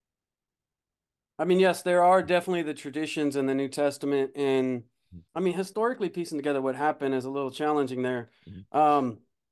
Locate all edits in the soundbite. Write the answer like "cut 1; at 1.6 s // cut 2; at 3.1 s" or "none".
none